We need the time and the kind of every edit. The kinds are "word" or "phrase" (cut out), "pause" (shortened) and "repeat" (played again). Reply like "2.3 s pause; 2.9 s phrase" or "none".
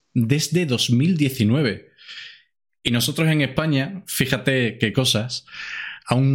none

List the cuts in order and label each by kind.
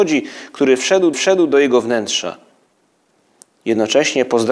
1.1 s repeat

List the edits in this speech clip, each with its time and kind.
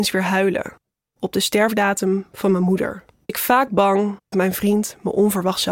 3.3 s word; 4.3 s word

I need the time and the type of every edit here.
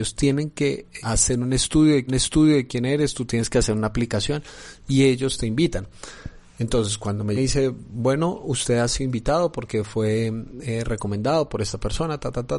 1.0 s word; 2.1 s repeat; 7.3 s phrase

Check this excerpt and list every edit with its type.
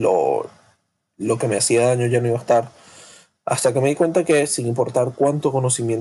none

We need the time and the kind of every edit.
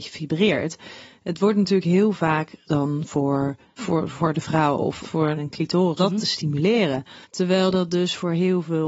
2.6 s word; 3.8 s word; 5.0 s phrase; 5.4 s phrase; 6.0 s word; 7.2 s pause

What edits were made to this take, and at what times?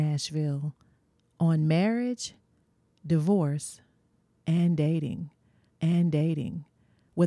5.7 s repeat

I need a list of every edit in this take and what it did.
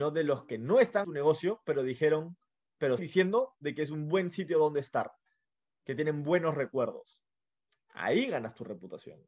1.0 s word; 3.0 s word

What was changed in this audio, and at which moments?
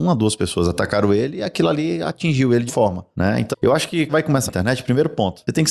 2.7 s word; 3.5 s word; 4.1 s phrase; 4.5 s word

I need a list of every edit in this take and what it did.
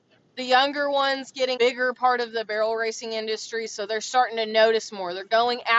1.6 s phrase

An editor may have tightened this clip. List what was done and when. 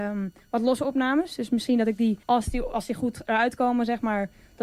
2.2 s pause

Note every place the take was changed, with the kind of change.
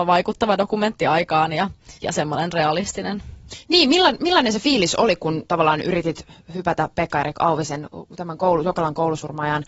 2.0 s pause

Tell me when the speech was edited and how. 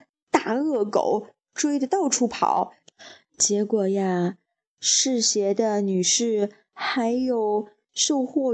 none

